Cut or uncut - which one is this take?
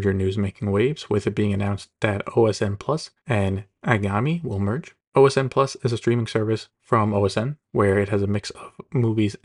cut